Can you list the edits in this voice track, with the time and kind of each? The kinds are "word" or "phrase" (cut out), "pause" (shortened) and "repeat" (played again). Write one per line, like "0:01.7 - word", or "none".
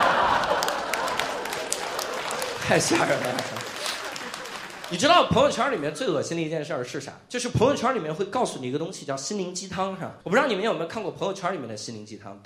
0:10.2 - pause